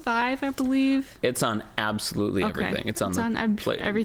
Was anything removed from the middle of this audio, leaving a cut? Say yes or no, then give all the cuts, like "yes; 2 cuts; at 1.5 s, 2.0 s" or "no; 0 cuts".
no; 0 cuts